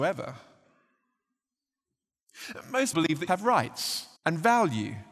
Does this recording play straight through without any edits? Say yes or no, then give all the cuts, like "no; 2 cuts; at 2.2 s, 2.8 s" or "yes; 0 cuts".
no; 3 cuts; at 2.9 s, 3.3 s, 4.2 s